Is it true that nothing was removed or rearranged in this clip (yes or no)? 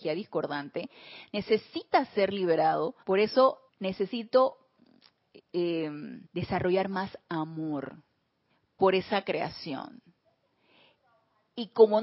no